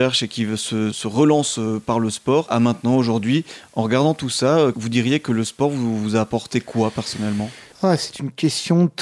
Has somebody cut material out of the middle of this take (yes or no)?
no